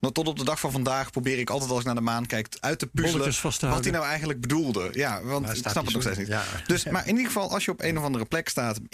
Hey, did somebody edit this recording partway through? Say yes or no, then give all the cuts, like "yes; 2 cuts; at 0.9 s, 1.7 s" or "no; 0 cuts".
no; 0 cuts